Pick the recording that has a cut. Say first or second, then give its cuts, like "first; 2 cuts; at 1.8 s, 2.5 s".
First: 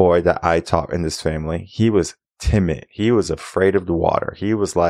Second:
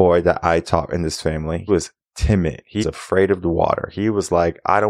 second; 2 cuts; at 1.7 s, 2.8 s